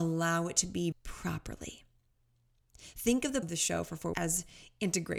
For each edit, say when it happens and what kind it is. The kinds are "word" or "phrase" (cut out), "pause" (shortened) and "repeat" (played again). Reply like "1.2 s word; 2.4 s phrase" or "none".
0.9 s word; 3.4 s word; 4.1 s word